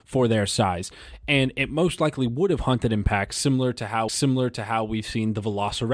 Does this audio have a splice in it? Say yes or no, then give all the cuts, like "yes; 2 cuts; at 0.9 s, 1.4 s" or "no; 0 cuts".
yes; 1 cut; at 4.1 s